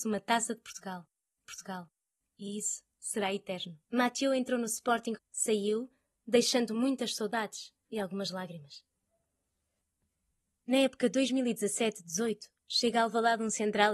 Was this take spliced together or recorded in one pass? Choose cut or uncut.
cut